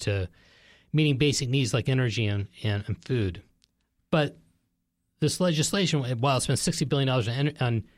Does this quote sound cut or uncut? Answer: uncut